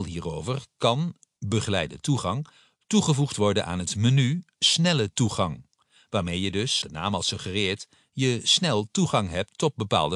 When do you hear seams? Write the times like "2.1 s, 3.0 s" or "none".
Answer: 6.8 s